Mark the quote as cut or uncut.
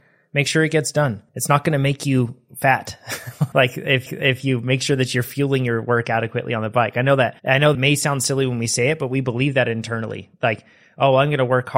cut